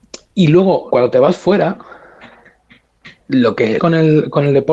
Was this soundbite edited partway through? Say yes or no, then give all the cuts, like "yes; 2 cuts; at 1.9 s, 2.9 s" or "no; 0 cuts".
yes; 3 cuts; at 0.9 s, 3.2 s, 3.8 s